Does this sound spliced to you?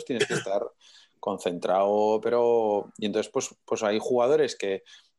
no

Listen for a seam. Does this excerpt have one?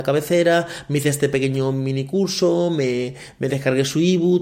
no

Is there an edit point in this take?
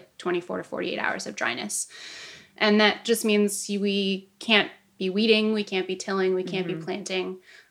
yes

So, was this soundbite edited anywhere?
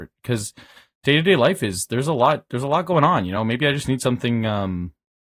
no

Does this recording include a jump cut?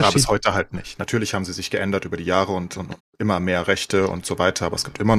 yes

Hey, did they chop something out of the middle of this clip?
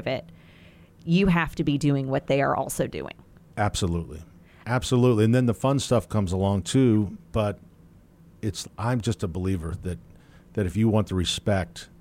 yes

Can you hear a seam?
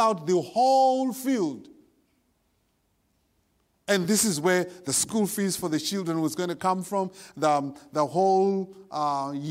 no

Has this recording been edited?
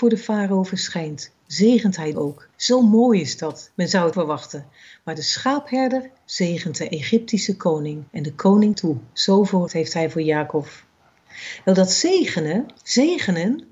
yes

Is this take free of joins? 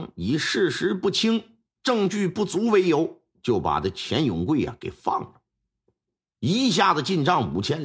yes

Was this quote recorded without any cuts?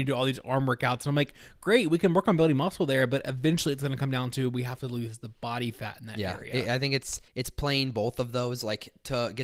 no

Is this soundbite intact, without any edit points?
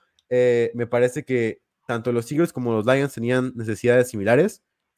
yes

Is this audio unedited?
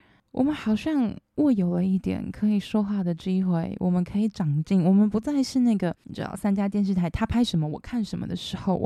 no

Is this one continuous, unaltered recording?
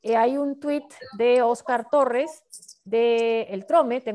yes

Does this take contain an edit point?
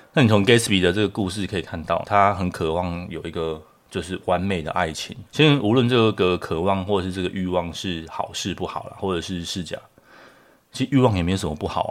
yes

